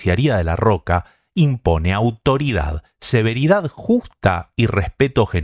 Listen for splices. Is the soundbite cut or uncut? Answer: uncut